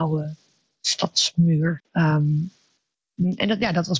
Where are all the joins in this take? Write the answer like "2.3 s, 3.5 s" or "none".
1.8 s